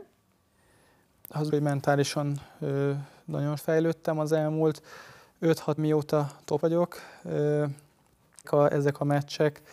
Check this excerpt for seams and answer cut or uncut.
cut